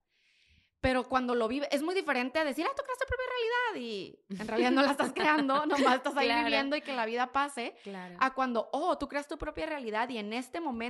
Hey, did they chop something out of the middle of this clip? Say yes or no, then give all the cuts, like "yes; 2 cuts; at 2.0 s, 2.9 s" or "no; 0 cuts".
no; 0 cuts